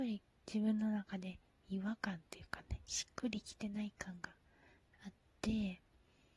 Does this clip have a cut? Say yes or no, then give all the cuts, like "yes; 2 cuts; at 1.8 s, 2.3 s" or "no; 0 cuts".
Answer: no; 0 cuts